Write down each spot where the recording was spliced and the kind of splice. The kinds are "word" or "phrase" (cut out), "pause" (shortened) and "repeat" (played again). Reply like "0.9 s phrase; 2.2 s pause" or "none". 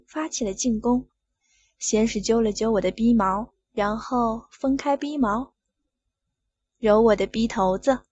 none